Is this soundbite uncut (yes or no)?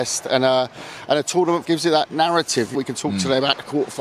no